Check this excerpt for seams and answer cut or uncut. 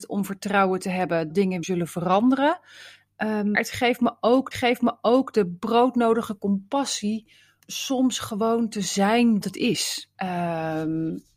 cut